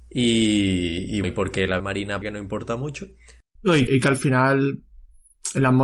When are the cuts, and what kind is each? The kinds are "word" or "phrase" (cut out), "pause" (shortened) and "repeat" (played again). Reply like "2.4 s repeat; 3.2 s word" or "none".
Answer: 1.2 s word; 1.8 s word; 2.2 s word; 3.9 s word